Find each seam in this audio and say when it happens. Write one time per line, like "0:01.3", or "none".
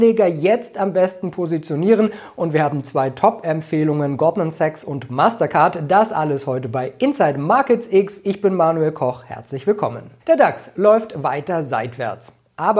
0:10.2